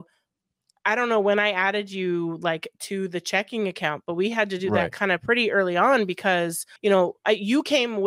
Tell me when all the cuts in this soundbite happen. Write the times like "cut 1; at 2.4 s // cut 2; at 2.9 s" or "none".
cut 1; at 6.8 s